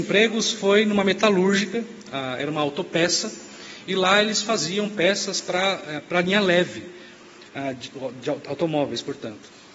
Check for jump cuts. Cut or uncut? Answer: uncut